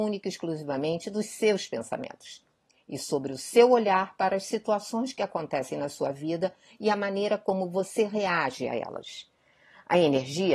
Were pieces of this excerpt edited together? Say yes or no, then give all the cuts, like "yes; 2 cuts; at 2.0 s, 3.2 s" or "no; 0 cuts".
no; 0 cuts